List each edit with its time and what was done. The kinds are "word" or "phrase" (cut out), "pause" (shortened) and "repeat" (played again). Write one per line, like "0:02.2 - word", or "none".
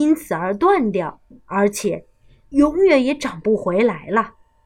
0:01.3 - pause